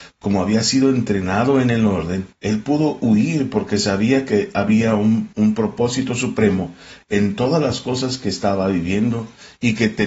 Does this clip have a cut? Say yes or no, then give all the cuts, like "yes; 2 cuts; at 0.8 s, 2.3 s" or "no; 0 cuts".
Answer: yes; 2 cuts; at 2.3 s, 5.3 s